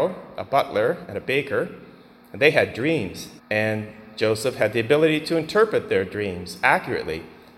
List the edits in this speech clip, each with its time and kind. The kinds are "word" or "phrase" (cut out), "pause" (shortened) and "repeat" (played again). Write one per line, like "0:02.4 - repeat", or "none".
0:03.4 - pause